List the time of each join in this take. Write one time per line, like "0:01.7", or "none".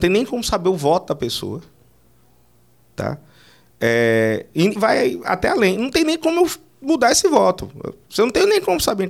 0:04.8